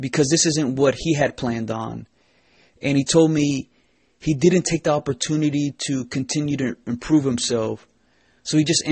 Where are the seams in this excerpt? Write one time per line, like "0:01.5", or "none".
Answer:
none